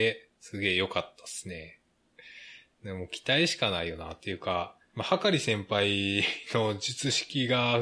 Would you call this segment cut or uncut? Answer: uncut